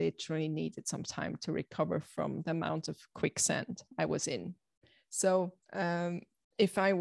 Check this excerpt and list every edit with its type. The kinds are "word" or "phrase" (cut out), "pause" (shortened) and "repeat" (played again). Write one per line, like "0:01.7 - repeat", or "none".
0:05.6 - pause